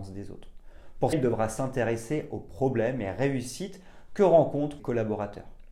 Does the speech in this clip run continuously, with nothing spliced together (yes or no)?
no